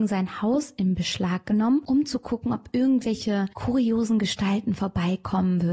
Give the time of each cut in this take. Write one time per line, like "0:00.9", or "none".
none